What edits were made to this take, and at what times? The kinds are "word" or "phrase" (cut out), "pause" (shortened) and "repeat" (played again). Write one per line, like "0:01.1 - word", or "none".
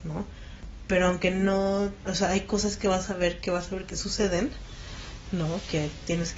0:02.1 - word